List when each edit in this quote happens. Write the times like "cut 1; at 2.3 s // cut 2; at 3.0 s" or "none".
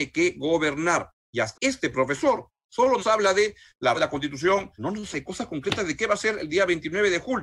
cut 1; at 1.5 s // cut 2; at 3.0 s // cut 3; at 3.9 s // cut 4; at 4.8 s // cut 5; at 5.1 s

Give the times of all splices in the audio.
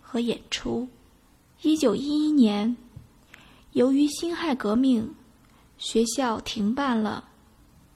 cut 1; at 1.2 s

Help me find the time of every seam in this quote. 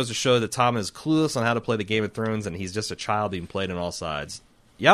none

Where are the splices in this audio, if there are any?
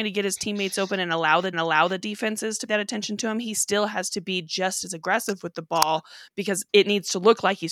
cut 1; at 1.5 s // cut 2; at 2.7 s // cut 3; at 6.7 s

